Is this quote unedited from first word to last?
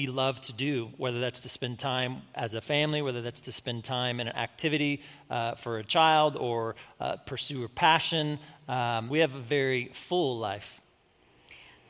no; 1 cut; at 9.1 s

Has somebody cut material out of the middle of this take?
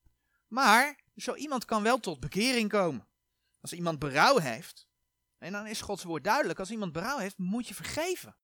no; 0 cuts

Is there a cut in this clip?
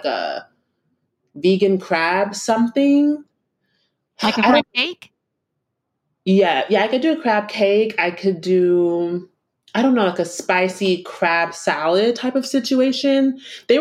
no; 0 cuts

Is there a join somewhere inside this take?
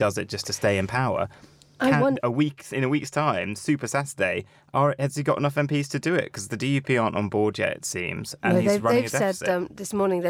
no; 0 cuts

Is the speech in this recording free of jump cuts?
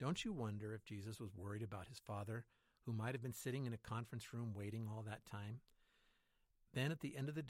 yes; 0 cuts

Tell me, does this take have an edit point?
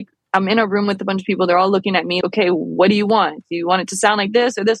yes; 1 cut; at 2.2 s

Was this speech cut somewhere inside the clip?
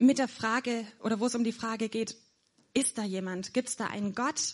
no; 0 cuts

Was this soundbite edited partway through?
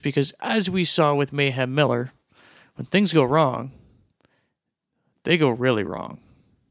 no; 0 cuts

